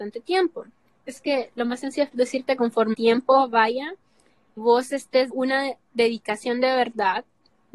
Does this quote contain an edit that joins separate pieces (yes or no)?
yes